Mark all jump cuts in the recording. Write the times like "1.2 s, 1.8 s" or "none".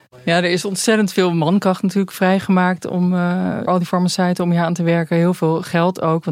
3.7 s